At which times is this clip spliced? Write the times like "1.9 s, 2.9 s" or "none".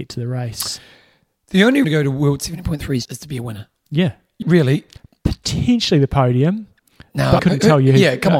1.8 s, 3.1 s, 4.4 s, 7.4 s